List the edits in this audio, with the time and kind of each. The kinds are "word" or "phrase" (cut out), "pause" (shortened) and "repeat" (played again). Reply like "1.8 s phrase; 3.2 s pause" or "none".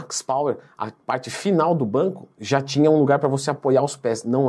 none